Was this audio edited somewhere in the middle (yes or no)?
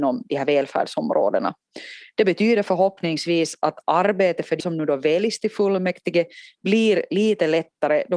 yes